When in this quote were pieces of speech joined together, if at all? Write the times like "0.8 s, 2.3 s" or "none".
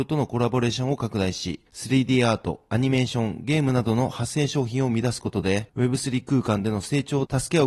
none